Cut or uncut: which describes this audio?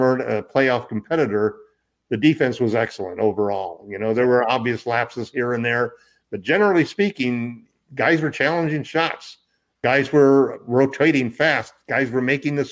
uncut